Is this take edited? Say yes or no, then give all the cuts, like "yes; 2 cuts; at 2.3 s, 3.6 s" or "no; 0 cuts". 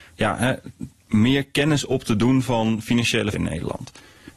yes; 1 cut; at 3.3 s